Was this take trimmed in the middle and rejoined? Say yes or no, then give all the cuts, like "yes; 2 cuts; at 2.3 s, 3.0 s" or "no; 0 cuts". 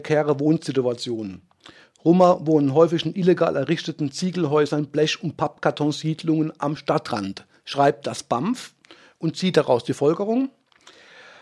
no; 0 cuts